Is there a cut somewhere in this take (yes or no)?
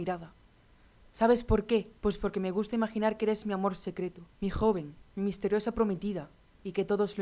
yes